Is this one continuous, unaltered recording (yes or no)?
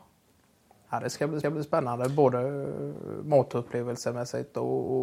no